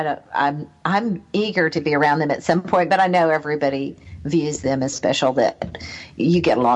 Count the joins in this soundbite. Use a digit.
1